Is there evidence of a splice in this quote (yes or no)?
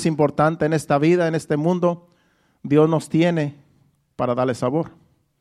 no